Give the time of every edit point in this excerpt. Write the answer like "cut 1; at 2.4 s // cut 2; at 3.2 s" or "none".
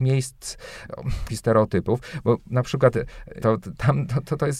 cut 1; at 1.3 s // cut 2; at 3.4 s